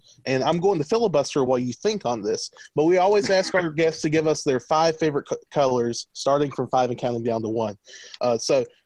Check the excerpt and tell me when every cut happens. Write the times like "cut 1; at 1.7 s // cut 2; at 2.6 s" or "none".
cut 1; at 1.5 s // cut 2; at 6.1 s